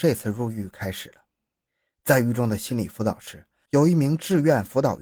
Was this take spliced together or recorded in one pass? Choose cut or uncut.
uncut